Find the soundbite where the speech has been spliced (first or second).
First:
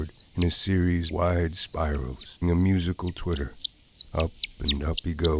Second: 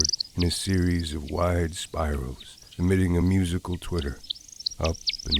first